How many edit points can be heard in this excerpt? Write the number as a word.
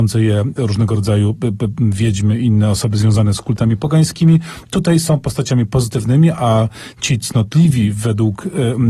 zero